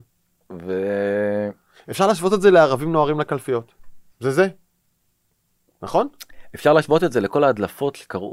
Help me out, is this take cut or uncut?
cut